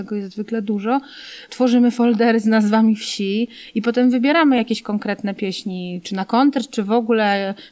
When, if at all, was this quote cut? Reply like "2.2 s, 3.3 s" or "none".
none